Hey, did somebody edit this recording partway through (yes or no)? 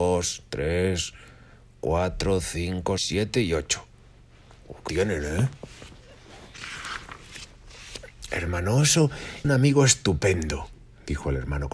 yes